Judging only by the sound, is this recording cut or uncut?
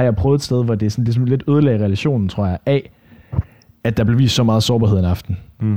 uncut